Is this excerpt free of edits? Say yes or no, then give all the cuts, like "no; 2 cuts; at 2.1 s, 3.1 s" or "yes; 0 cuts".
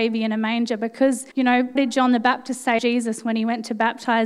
no; 3 cuts; at 1.3 s, 1.8 s, 2.8 s